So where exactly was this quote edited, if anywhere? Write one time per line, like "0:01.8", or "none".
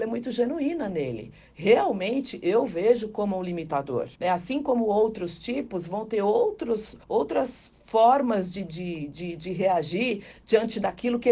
0:04.2
0:07.0